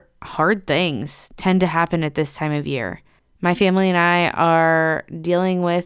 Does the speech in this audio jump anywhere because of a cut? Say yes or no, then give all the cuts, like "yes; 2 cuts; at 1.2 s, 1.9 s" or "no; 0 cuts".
no; 0 cuts